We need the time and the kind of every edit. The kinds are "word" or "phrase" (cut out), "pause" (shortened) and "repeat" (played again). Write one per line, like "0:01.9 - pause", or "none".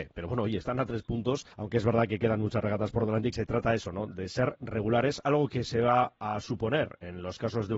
0:01.5 - pause
0:03.3 - phrase